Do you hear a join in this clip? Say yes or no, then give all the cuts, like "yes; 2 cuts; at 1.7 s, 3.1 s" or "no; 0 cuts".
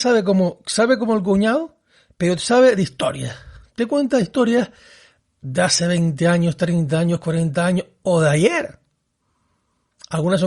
no; 0 cuts